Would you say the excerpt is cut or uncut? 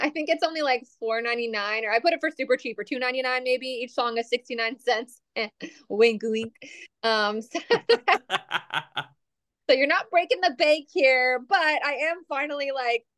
uncut